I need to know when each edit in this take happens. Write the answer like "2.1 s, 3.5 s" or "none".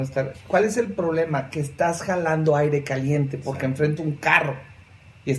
4.0 s

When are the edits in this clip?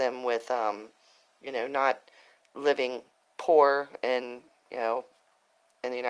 none

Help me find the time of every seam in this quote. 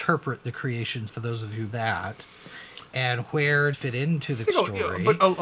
1.1 s, 1.7 s, 3.7 s, 4.4 s

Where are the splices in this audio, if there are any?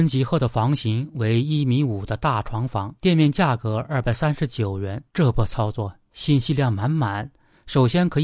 3.0 s, 5.1 s

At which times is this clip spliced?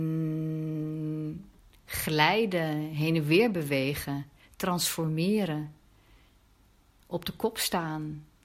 none

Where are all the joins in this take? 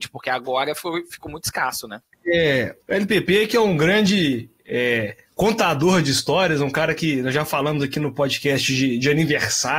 2.8 s

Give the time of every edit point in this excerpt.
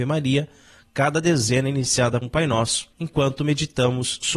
2.2 s, 2.9 s

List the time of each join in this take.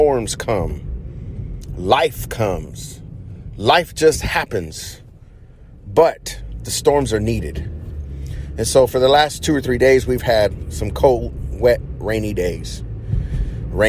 none

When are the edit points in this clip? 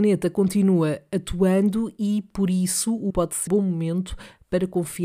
3.1 s, 3.5 s

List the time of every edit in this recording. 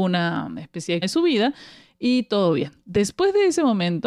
1.0 s

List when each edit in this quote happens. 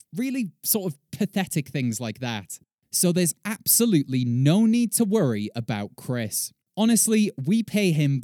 none

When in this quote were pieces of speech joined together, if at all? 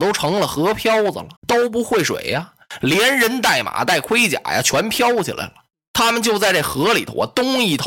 1.4 s

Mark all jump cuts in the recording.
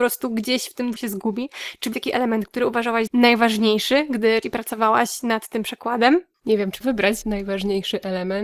1.0 s, 1.9 s, 3.1 s, 4.4 s, 6.8 s, 7.2 s

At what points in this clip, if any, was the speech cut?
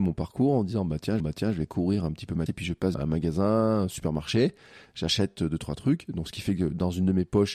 1.2 s, 2.5 s, 2.9 s

